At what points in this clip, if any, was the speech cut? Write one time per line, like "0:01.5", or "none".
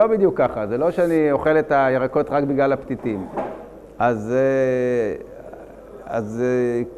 none